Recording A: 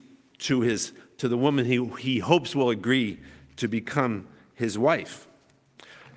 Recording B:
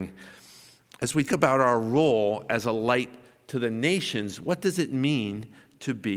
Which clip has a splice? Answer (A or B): B